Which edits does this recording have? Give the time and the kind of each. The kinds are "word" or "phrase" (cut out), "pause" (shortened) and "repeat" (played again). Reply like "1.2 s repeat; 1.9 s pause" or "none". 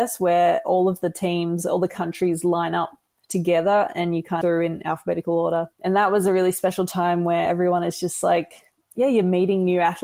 4.4 s phrase; 5.7 s pause